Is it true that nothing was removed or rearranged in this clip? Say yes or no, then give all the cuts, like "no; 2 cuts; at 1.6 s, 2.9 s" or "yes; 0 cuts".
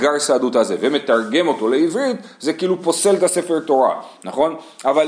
yes; 0 cuts